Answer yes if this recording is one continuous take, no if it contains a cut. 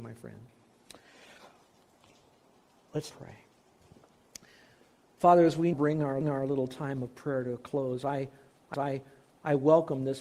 no